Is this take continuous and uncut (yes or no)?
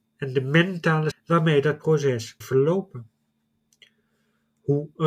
no